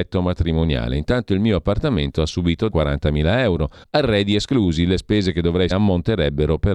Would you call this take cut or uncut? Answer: cut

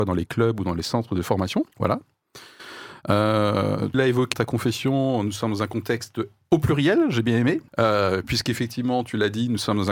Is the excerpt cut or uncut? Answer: cut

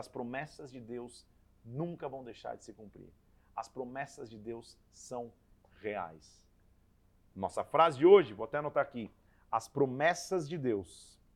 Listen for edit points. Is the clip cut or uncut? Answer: uncut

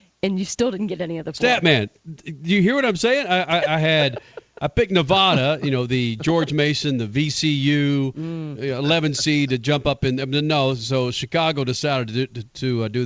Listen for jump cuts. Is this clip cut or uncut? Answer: uncut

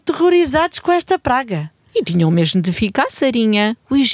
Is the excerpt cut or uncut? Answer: uncut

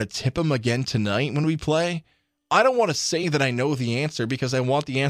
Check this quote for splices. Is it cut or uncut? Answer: uncut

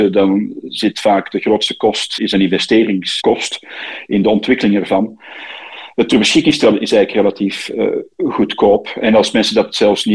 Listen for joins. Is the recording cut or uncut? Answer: cut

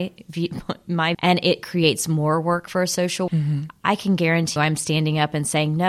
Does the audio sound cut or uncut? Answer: cut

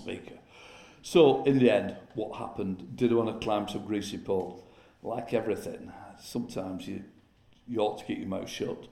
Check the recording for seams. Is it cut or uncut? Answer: uncut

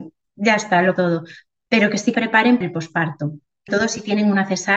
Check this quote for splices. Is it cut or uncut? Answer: cut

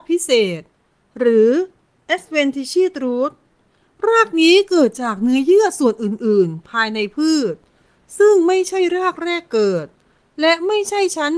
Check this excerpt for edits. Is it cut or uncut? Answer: uncut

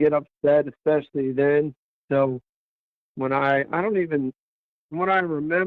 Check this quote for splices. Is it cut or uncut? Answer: uncut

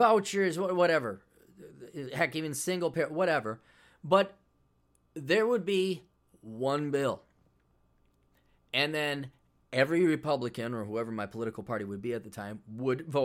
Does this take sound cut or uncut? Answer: uncut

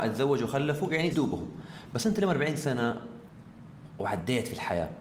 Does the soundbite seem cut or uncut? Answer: cut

